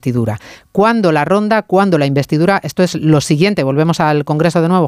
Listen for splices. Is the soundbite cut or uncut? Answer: uncut